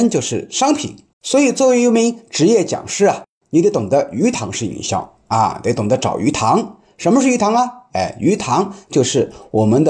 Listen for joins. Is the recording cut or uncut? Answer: cut